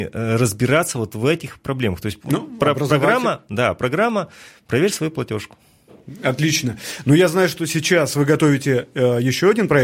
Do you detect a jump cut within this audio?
no; 0 cuts

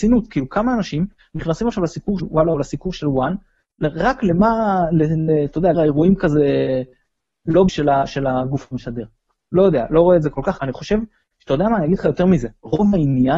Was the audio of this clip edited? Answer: yes; 4 cuts; at 2.2 s, 5.7 s, 7.7 s, 10.6 s

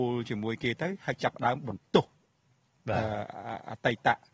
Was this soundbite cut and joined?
no; 0 cuts

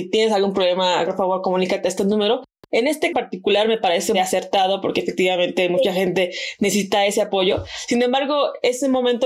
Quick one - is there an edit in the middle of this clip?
yes; 1 cut; at 3.1 s

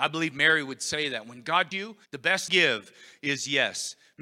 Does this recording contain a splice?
yes; 3 cuts; at 1.7 s, 2.1 s, 2.5 s

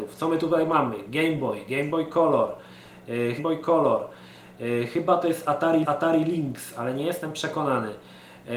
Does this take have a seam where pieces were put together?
yes; 2 cuts; at 3.4 s, 5.8 s

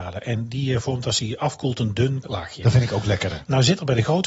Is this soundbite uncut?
no; 1 cut; at 2.2 s

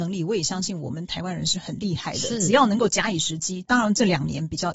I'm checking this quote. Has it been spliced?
no; 0 cuts

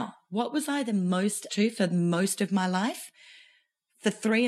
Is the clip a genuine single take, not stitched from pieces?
no; 1 cut; at 1.5 s

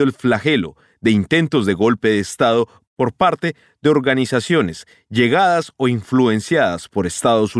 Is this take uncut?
yes; 0 cuts

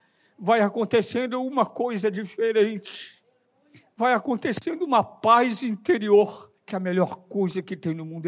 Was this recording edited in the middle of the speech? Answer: yes; 1 cut; at 6.6 s

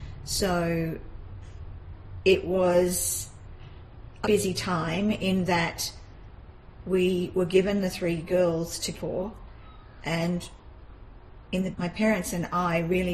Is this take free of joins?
no; 3 cuts; at 4.2 s, 8.9 s, 11.7 s

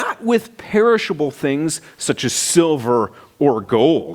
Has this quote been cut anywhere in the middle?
no; 0 cuts

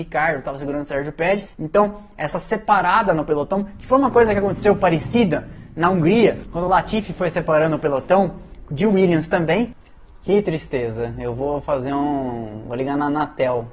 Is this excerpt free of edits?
yes; 0 cuts

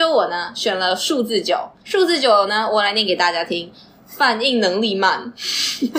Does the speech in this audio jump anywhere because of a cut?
no; 0 cuts

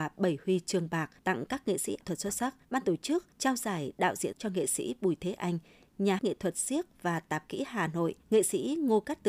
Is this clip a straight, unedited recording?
no; 7 cuts; at 1.2 s, 2.0 s, 2.6 s, 3.3 s, 4.3 s, 6.2 s, 8.2 s

